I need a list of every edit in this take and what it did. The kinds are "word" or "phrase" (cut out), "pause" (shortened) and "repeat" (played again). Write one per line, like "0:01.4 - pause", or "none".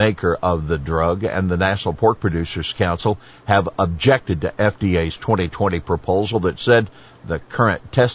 none